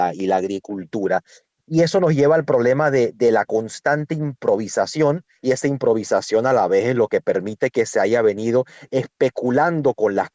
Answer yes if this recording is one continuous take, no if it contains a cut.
yes